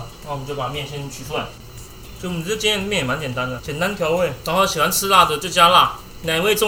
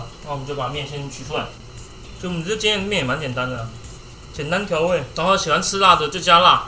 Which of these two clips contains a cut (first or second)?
first